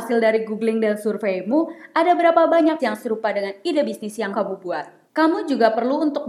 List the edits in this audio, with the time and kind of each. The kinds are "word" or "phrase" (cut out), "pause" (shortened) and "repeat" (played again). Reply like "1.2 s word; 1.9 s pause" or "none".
2.8 s word; 4.3 s word; 5.1 s pause